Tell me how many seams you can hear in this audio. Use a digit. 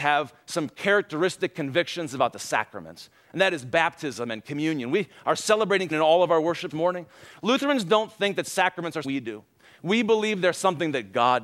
3